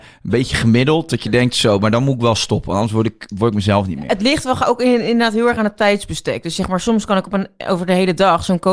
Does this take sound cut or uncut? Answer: uncut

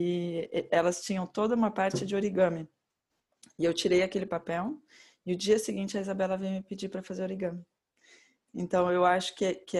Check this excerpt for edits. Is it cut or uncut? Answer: uncut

